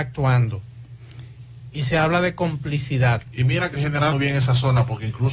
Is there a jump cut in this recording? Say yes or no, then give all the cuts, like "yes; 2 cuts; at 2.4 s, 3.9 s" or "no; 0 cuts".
yes; 2 cuts; at 3.7 s, 4.1 s